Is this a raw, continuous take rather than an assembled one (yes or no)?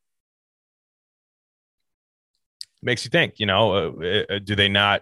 yes